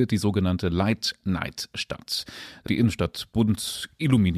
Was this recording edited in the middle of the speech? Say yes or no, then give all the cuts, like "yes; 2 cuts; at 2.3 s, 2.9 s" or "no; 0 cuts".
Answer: yes; 1 cut; at 2.7 s